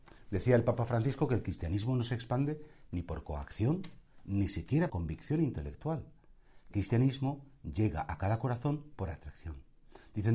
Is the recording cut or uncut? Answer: cut